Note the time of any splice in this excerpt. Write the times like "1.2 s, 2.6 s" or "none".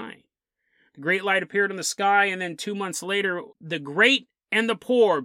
3.5 s